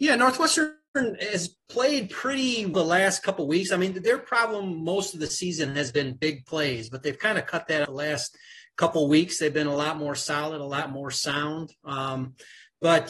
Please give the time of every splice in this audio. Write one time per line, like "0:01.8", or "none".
0:02.7
0:07.8

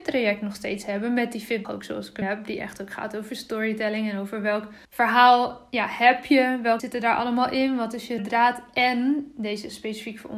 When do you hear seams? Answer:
0:01.6
0:02.2
0:04.8
0:06.8
0:08.2

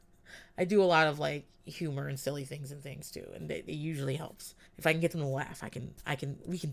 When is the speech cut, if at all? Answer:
0:04.7

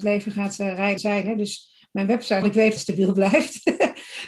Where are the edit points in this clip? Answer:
0:01.0
0:02.4
0:02.8

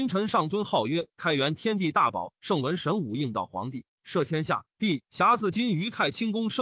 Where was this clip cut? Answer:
0:04.7

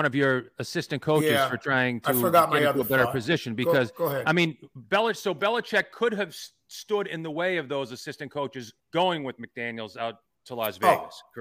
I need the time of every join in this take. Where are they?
0:08.8

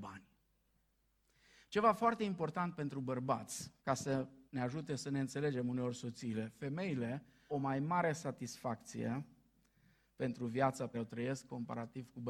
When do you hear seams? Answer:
0:03.8
0:04.5
0:07.5
0:10.9

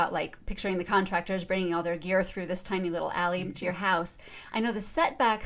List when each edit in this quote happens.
0:03.5

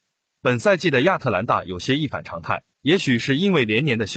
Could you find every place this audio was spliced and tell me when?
0:02.7

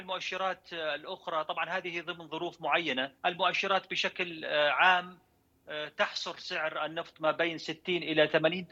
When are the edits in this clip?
0:03.2

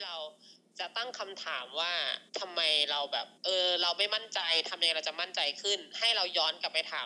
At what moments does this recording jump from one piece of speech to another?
0:02.3
0:03.4

